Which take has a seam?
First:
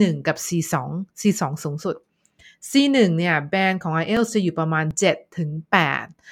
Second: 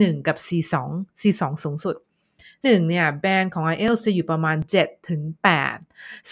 second; 1 cut; at 2.6 s

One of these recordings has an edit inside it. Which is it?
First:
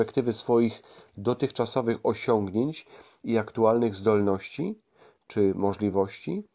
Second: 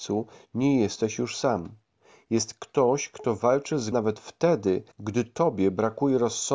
second; 3 cuts; at 1.9 s, 3.9 s, 4.9 s

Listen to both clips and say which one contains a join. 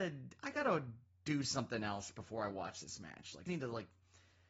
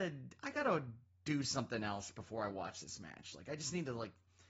first; 1 cut; at 3.5 s

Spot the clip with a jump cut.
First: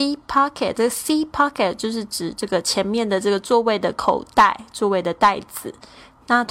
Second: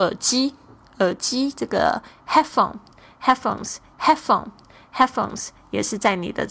second; 1 cut; at 3.9 s

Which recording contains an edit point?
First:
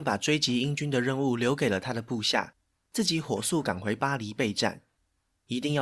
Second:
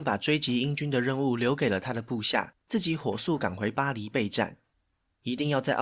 second; 1 cut; at 2.6 s

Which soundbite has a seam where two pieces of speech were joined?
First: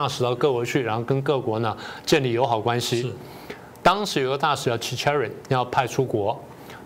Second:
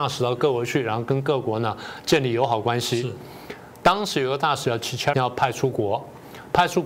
second; 1 cut; at 5.1 s

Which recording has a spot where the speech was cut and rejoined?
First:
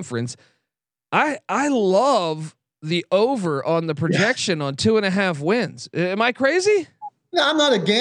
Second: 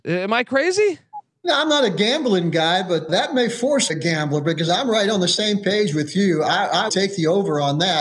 second; 3 cuts; at 3.1 s, 3.9 s, 6.9 s

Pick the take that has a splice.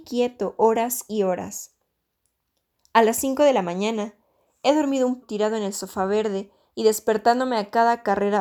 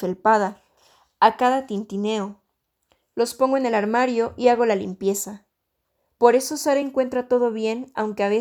first; 1 cut; at 5.2 s

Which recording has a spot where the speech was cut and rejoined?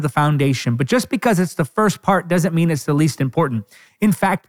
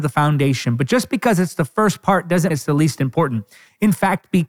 second; 1 cut; at 2.5 s

